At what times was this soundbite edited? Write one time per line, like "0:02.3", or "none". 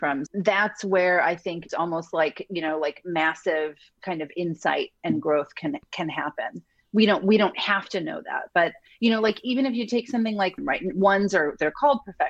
0:01.7
0:10.6